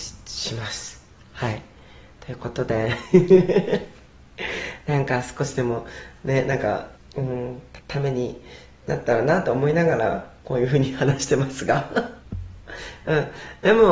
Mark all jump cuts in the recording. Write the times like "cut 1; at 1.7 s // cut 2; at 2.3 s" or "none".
cut 1; at 6.9 s // cut 2; at 7.8 s // cut 3; at 12.2 s